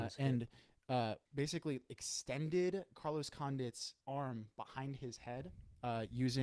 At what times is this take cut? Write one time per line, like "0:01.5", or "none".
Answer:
0:01.3
0:04.0